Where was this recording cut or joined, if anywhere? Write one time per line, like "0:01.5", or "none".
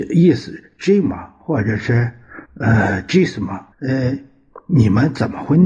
0:02.4
0:03.7